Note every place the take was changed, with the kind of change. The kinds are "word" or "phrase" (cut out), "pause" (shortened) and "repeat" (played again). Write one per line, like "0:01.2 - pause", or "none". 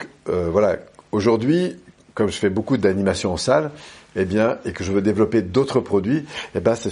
none